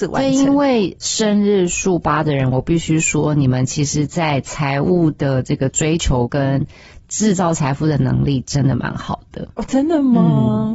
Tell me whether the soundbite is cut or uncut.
cut